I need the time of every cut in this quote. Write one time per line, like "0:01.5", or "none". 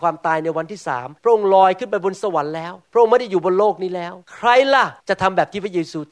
0:01.2
0:02.8
0:04.2
0:05.0

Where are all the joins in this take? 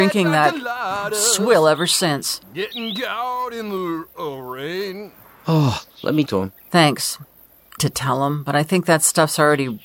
0:02.4
0:05.9
0:06.3
0:06.6
0:07.8

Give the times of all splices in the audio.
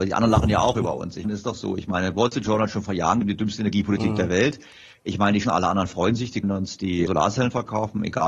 0:01.2
0:03.2
0:05.4
0:06.4
0:07.1

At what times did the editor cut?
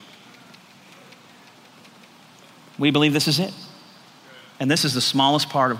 none

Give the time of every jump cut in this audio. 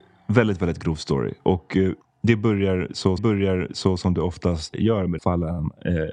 0:02.0
0:03.2
0:04.7
0:05.2

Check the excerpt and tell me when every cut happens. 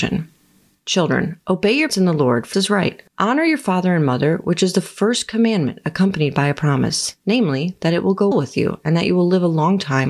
0:01.9
0:02.5
0:03.1
0:08.3

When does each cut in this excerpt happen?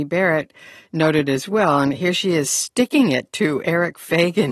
none

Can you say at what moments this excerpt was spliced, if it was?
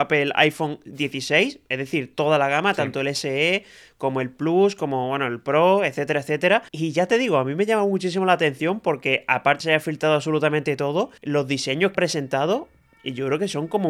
0:06.7
0:09.6
0:11.2
0:11.9

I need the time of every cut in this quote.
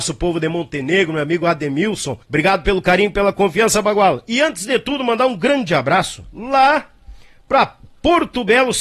0:02.2

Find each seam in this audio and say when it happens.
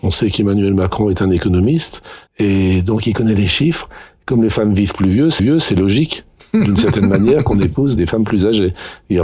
0:02.3
0:05.4
0:08.0

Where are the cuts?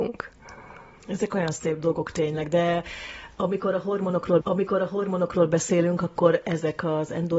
0:04.4

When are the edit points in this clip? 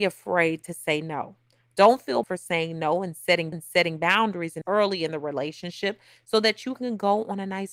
0:02.2
0:03.5
0:04.6

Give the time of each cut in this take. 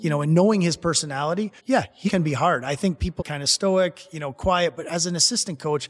0:01.6
0:02.1
0:03.2

